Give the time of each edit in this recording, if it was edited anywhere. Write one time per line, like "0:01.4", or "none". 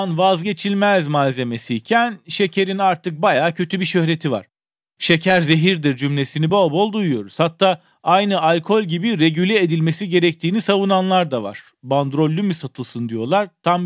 none